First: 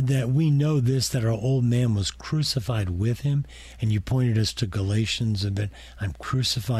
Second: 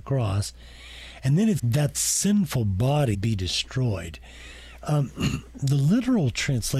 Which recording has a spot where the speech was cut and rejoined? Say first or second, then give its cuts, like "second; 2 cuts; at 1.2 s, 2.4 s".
second; 3 cuts; at 1.6 s, 1.9 s, 3.1 s